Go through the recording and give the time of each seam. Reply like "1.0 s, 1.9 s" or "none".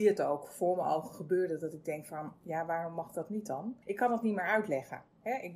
3.8 s